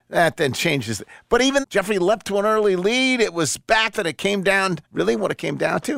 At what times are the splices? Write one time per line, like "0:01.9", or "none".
0:01.6
0:02.2
0:03.9
0:04.8